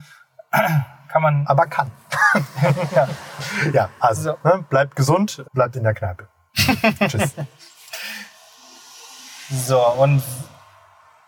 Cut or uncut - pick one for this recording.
cut